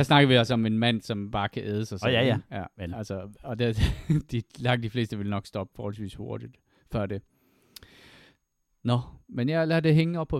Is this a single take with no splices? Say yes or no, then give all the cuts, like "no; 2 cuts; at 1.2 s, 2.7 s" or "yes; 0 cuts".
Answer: no; 1 cut; at 5.7 s